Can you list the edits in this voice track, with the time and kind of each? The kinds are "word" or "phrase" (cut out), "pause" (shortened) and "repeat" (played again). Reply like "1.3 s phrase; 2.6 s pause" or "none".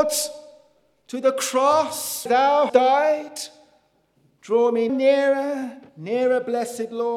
2.3 s word; 2.7 s word; 4.9 s word; 5.9 s pause